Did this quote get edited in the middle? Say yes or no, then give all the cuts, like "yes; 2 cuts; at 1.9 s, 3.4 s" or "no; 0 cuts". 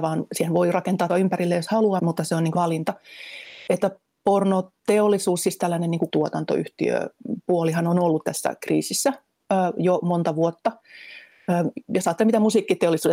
yes; 4 cuts; at 1.1 s, 2.0 s, 2.5 s, 6.1 s